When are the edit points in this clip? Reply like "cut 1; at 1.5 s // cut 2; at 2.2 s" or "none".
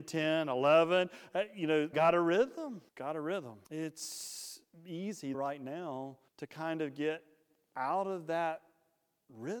cut 1; at 1.9 s // cut 2; at 2.9 s // cut 3; at 3.6 s // cut 4; at 5.3 s // cut 5; at 6.3 s